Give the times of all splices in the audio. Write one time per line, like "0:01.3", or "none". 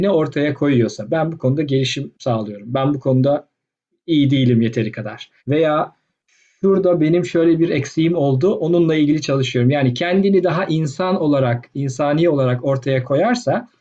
0:05.4